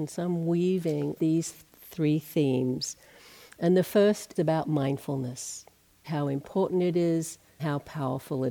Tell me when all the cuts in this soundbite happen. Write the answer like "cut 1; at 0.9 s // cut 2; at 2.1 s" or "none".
cut 1; at 1.2 s // cut 2; at 1.5 s // cut 3; at 4.4 s // cut 4; at 6.0 s // cut 5; at 7.6 s